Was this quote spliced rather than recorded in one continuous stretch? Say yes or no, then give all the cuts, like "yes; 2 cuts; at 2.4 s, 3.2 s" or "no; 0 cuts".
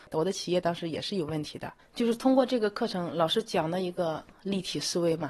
yes; 1 cut; at 1.8 s